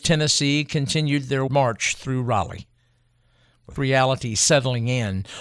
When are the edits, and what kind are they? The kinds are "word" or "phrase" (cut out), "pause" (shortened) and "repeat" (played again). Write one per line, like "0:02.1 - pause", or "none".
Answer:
0:01.5 - word
0:03.8 - word